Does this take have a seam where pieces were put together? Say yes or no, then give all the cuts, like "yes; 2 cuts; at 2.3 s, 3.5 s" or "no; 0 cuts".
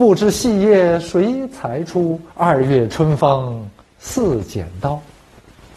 yes; 2 cuts; at 2.3 s, 3.8 s